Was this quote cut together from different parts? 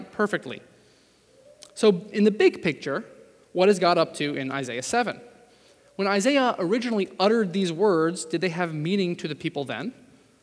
no; 0 cuts

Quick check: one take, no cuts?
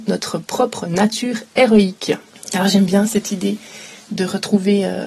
no; 1 cut; at 2.3 s

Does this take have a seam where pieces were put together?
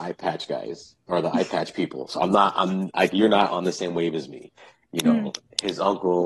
no; 0 cuts

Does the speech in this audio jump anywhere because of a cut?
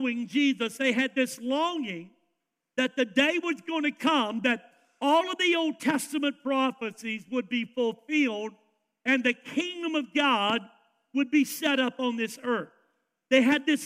no; 0 cuts

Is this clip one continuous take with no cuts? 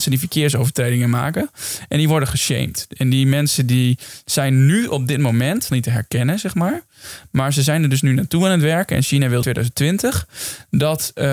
no; 2 cuts; at 5.7 s, 9.4 s

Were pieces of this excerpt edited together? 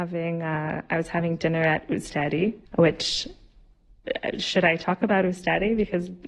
yes; 1 cut; at 2.7 s

